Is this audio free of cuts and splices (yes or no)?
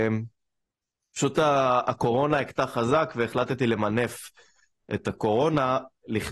yes